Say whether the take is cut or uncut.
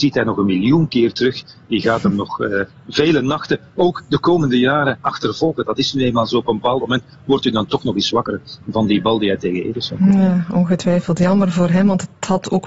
uncut